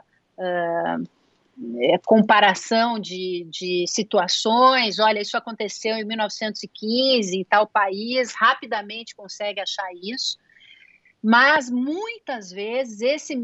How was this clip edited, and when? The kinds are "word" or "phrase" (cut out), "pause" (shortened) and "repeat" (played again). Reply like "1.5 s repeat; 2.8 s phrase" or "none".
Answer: none

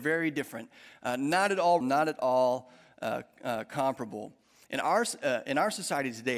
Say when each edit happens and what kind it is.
1.8 s word

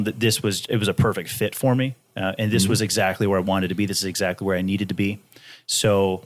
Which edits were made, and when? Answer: none

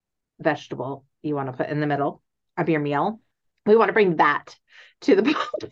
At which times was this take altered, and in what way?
none

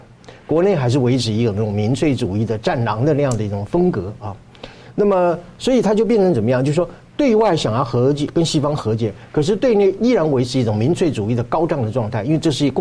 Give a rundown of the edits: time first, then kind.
none

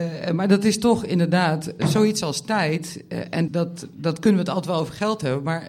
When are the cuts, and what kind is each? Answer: 1.8 s word; 3.5 s word

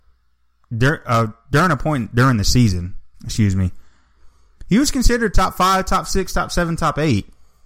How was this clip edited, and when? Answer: 3.1 s pause

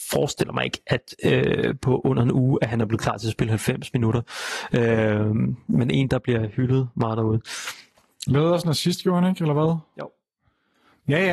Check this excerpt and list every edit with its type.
none

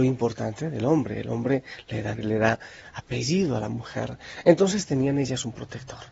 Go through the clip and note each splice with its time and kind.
2.1 s word

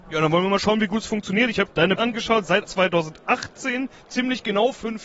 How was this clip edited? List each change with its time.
1.7 s word; 2.0 s word; 2.6 s word

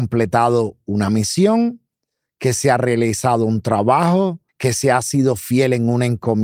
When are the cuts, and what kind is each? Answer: 4.5 s pause

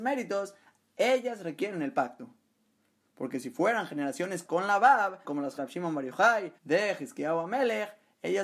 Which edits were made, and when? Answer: 4.4 s word; 5.2 s word; 5.6 s phrase; 6.6 s pause

